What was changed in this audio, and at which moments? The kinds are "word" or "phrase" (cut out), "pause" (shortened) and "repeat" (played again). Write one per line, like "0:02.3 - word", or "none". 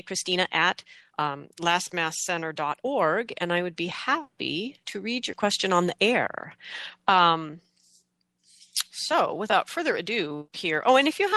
0:08.9 - pause